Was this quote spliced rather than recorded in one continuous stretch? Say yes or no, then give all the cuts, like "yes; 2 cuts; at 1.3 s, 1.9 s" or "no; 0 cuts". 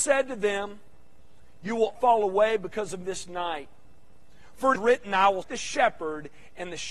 yes; 4 cuts; at 1.9 s, 3.0 s, 4.7 s, 5.4 s